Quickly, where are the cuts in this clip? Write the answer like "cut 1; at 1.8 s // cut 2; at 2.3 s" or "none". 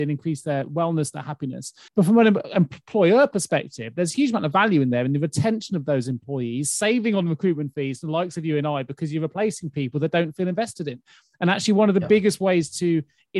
cut 1; at 1.9 s